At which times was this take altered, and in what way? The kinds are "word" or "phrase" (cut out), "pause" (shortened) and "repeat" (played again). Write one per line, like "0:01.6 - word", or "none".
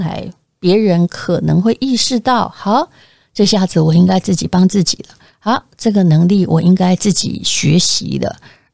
none